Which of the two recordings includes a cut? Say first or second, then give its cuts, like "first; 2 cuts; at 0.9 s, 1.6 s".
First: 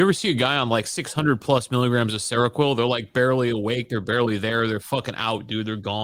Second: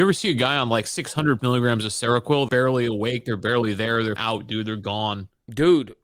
second; 3 cuts; at 1.4 s, 2.5 s, 4.2 s